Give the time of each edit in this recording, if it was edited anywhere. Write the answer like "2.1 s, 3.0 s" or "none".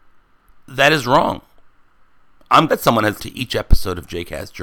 2.7 s, 3.2 s